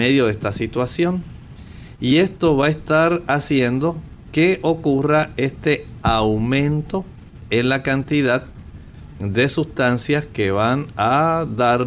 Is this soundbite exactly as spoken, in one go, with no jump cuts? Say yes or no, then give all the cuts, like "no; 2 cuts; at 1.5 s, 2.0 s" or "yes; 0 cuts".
yes; 0 cuts